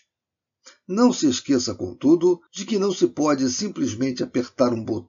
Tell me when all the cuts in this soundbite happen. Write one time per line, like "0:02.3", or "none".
0:02.5